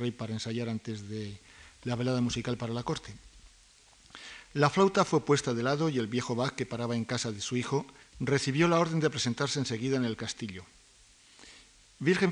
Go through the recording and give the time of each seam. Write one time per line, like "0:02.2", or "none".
0:08.0